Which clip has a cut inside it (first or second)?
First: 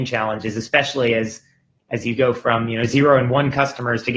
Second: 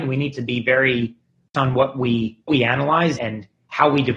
second